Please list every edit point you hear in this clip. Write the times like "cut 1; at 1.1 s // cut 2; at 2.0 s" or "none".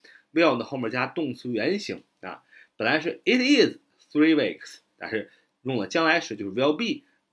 none